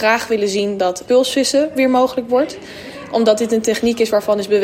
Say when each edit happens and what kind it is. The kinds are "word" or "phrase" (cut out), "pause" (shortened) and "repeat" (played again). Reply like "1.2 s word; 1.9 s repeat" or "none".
1.0 s word